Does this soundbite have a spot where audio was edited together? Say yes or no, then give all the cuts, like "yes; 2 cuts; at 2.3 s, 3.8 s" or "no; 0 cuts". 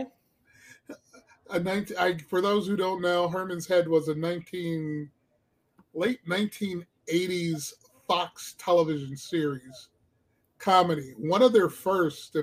no; 0 cuts